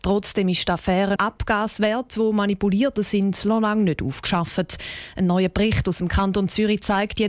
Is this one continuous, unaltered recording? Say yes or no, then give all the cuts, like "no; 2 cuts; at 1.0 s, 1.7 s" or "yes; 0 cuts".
no; 2 cuts; at 1.2 s, 3.0 s